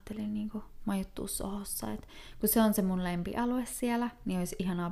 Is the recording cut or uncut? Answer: uncut